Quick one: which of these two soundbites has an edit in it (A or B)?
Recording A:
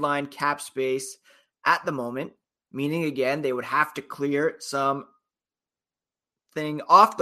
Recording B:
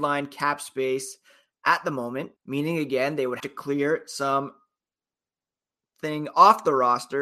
B